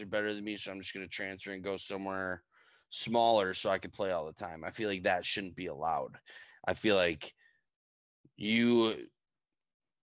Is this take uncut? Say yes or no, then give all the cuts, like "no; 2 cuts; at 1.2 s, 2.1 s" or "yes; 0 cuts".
yes; 0 cuts